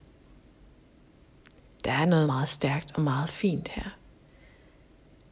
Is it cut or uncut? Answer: cut